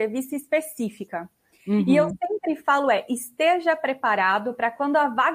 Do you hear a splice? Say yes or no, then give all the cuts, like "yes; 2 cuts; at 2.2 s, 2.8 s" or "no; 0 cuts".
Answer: no; 0 cuts